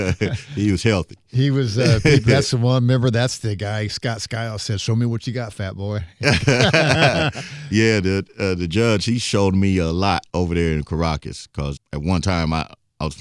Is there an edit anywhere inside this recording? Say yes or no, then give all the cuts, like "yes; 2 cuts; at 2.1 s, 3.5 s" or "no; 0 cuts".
yes; 2 cuts; at 10.3 s, 11.8 s